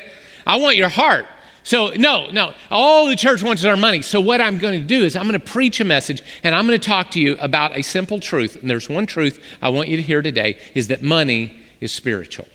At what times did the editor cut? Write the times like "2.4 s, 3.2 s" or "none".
none